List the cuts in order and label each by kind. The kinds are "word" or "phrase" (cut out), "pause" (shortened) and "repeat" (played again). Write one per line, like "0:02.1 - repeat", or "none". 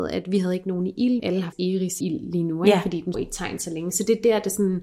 0:01.2 - word
0:01.5 - word
0:02.0 - word
0:03.1 - word